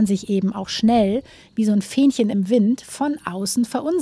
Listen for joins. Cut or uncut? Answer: uncut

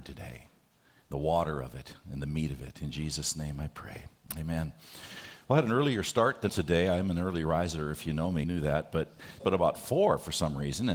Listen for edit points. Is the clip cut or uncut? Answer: cut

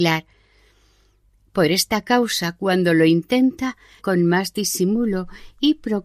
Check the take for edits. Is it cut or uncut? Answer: cut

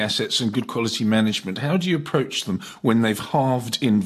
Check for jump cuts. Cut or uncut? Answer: uncut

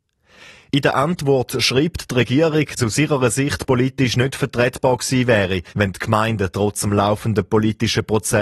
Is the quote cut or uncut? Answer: cut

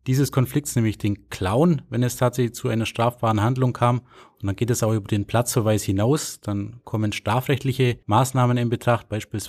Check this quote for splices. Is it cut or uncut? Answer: cut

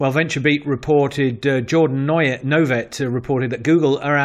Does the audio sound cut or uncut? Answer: uncut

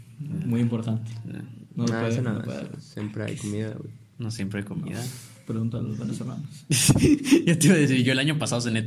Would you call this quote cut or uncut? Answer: uncut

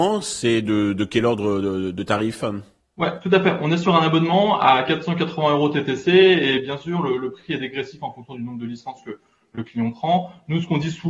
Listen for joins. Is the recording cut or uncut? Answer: uncut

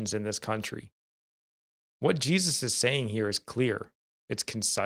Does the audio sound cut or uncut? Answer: uncut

